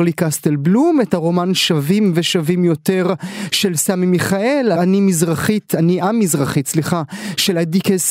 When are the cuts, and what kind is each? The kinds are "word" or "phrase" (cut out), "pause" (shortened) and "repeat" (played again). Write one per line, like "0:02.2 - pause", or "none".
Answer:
0:04.8 - word